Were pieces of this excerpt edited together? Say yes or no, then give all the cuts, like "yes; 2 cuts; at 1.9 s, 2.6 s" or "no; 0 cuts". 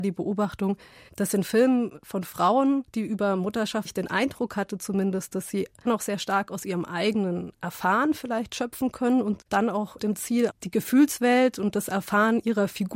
yes; 5 cuts; at 2.9 s, 3.9 s, 5.8 s, 9.5 s, 10.0 s